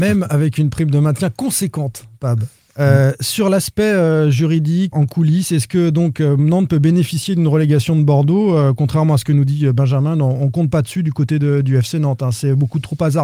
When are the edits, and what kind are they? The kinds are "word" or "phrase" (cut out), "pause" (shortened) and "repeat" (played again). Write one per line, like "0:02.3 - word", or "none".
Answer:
0:04.9 - word